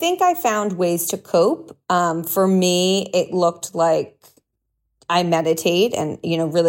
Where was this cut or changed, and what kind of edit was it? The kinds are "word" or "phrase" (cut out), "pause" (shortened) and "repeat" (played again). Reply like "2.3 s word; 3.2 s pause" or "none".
none